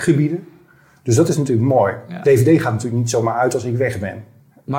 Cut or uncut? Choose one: uncut